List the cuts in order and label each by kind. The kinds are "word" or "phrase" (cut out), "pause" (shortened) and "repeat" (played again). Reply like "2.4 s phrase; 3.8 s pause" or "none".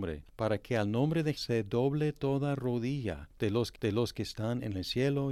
1.4 s word; 3.7 s repeat